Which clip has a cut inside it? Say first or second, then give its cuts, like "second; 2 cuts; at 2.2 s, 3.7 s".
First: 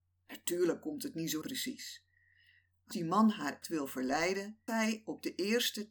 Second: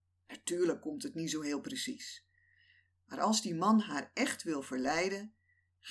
first; 4 cuts; at 1.4 s, 2.9 s, 3.6 s, 4.7 s